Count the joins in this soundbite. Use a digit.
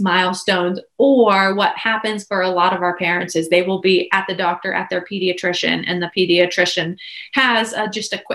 0